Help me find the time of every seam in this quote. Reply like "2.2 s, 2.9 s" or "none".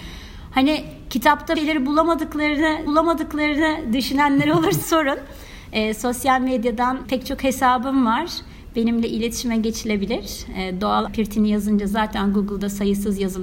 1.5 s, 2.9 s, 4.8 s, 7.0 s, 11.1 s